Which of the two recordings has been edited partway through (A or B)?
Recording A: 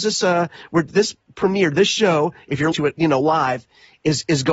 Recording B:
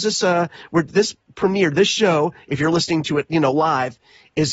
A